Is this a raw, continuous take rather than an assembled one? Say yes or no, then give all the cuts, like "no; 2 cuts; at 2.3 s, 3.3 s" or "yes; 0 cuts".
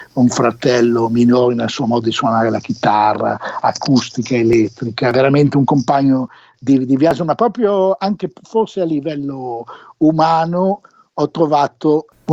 yes; 0 cuts